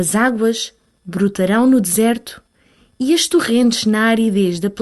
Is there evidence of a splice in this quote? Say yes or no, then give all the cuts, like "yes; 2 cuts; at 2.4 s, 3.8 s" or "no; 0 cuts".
no; 0 cuts